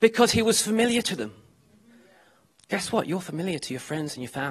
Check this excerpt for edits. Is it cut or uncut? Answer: uncut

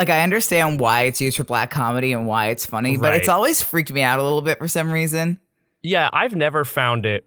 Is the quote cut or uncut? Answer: uncut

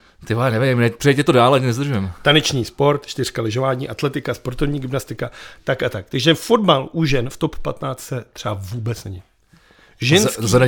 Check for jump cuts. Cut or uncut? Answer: uncut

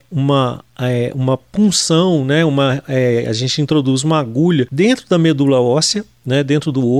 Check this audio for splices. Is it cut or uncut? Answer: uncut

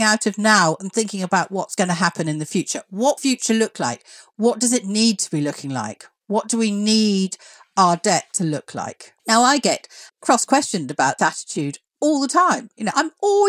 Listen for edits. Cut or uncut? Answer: cut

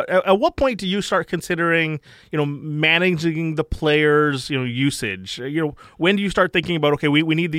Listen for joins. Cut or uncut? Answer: uncut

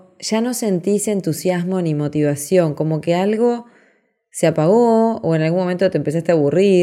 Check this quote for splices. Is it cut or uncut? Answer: uncut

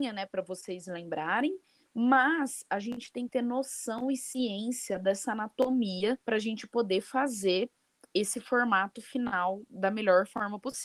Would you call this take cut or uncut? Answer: cut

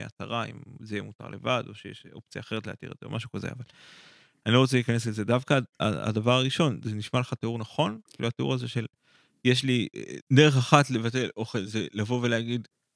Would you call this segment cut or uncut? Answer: uncut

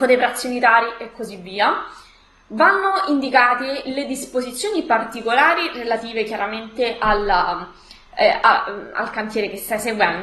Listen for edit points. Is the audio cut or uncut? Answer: uncut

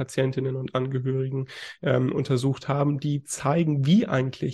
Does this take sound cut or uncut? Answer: uncut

